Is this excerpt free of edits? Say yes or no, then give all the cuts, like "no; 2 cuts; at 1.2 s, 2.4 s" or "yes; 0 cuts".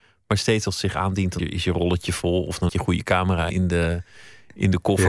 no; 3 cuts; at 1.4 s, 2.7 s, 3.5 s